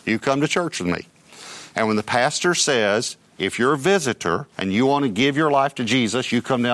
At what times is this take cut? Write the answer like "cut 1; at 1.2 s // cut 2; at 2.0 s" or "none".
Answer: cut 1; at 4.5 s